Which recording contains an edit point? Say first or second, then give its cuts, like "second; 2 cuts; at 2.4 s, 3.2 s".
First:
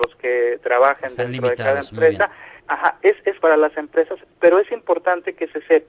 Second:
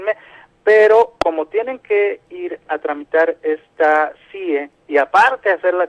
first; 2 cuts; at 2.6 s, 3.4 s